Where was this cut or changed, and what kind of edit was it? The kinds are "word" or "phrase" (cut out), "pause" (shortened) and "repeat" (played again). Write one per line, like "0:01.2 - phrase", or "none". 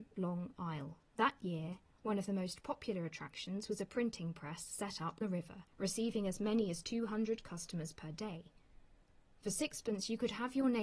0:01.1 - pause
0:05.2 - word
0:05.7 - pause